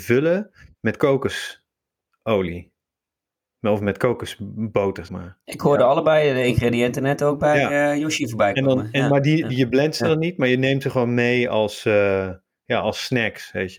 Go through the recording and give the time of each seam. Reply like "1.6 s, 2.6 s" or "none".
5.1 s